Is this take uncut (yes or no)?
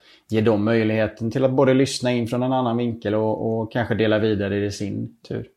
yes